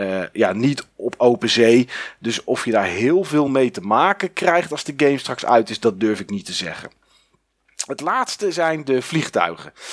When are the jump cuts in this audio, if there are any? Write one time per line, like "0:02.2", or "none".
none